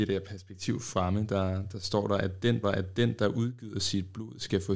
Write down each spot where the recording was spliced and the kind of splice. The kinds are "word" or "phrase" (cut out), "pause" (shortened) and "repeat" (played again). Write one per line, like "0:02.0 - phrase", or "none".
0:02.6 - repeat